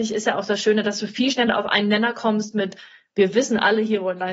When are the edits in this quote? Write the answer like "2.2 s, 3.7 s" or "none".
none